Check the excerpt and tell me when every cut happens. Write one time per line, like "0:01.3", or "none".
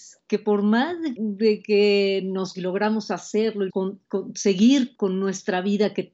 0:01.2
0:02.5
0:03.7
0:05.0